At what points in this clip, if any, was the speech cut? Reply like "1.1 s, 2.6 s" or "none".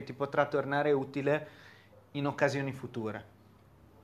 none